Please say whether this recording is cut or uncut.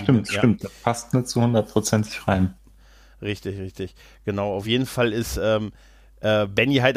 uncut